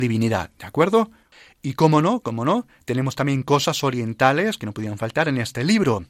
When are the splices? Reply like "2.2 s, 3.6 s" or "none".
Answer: none